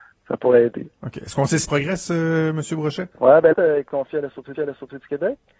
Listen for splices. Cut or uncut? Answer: cut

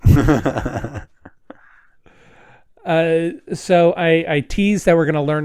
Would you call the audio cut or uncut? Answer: uncut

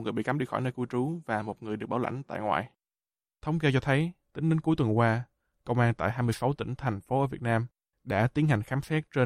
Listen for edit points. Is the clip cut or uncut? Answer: uncut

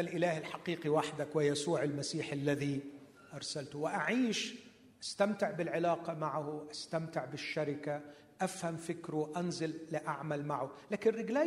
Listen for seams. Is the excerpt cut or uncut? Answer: uncut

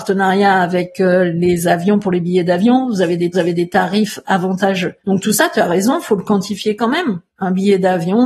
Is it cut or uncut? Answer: cut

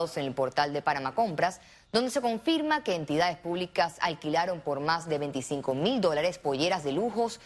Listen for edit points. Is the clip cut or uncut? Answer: uncut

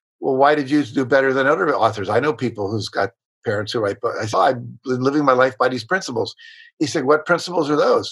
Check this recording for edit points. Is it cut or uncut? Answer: cut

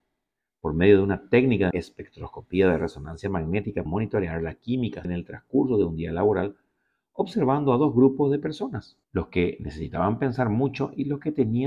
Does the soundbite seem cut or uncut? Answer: cut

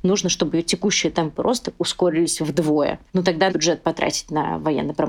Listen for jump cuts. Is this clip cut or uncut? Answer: cut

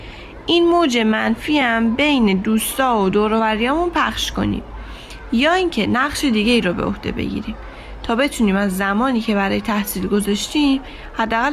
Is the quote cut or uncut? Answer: uncut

